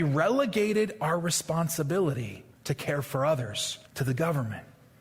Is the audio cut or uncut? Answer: cut